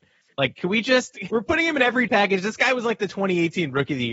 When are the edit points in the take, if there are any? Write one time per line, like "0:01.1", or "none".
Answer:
0:01.3
0:02.1

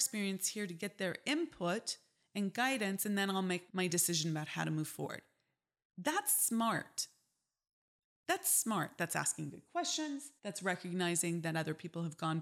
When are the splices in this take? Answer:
0:03.7
0:10.4

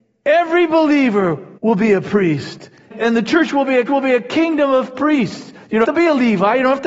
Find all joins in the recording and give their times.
0:01.6
0:02.9
0:03.9
0:05.8

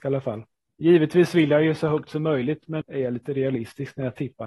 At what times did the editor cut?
0:02.8

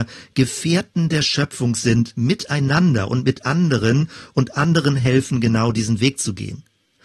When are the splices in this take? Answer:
none

